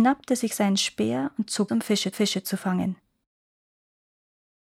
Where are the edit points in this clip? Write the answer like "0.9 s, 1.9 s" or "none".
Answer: 1.7 s, 2.1 s